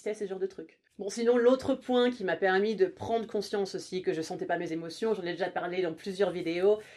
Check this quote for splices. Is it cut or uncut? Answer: uncut